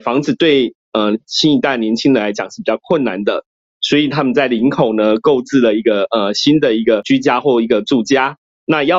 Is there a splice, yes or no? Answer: no